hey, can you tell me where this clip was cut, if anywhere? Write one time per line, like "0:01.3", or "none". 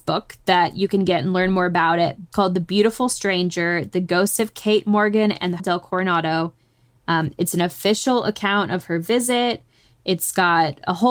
0:02.3
0:05.6